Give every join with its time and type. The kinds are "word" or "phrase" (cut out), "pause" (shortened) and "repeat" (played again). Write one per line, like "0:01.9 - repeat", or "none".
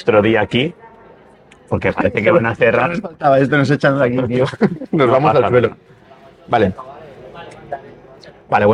none

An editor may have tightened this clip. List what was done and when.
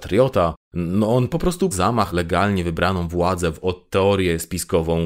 0:01.7 - word
0:02.1 - word
0:03.6 - word

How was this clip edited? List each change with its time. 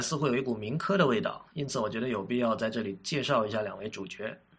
0:01.5 - pause

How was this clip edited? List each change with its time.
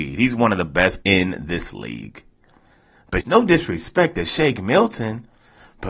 0:01.0 - word
0:03.2 - phrase

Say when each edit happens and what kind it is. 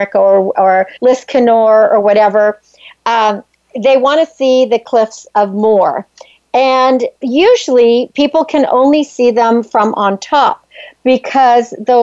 0:01.0 - pause
0:07.2 - word

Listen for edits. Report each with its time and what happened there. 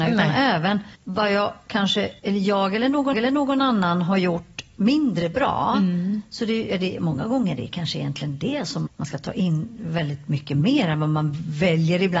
0:00.9 - pause
0:02.2 - pause
0:03.1 - repeat
0:08.9 - word

